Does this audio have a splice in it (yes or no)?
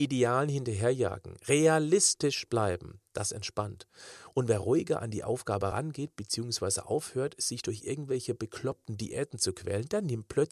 no